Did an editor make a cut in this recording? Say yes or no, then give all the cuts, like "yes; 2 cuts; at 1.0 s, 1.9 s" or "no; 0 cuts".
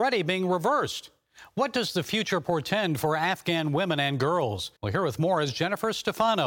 yes; 1 cut; at 4.8 s